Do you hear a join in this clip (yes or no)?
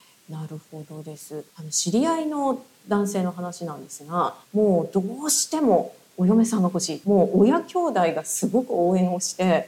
yes